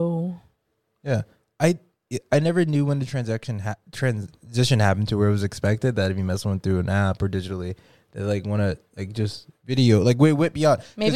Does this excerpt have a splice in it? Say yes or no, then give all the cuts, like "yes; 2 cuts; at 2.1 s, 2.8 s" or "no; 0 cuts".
no; 0 cuts